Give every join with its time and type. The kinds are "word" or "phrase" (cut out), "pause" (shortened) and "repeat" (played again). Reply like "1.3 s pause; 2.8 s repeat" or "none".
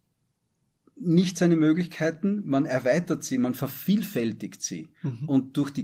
none